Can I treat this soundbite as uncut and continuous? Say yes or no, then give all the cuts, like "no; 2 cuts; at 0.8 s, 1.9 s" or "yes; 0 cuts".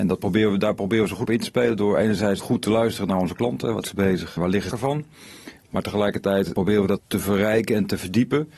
no; 7 cuts; at 1.2 s, 2.4 s, 3.8 s, 4.4 s, 4.7 s, 6.5 s, 7.0 s